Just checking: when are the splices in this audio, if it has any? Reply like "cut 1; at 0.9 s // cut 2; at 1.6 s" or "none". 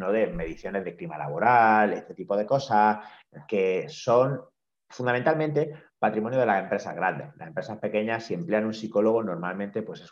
none